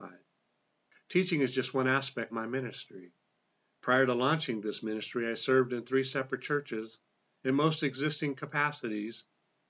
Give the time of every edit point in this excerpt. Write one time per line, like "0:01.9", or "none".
0:02.3